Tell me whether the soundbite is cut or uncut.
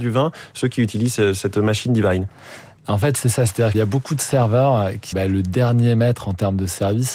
cut